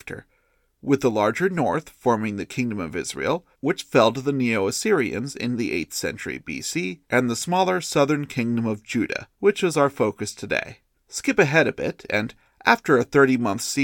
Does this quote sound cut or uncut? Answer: cut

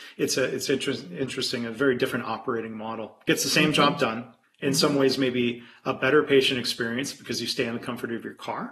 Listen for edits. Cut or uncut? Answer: cut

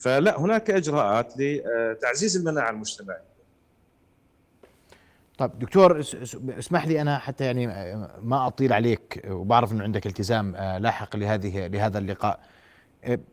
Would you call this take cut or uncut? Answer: uncut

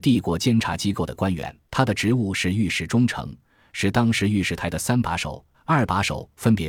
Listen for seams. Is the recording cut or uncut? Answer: cut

